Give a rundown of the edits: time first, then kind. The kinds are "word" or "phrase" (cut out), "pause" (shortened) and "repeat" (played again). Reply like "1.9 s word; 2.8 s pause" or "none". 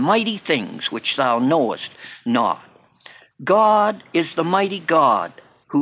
none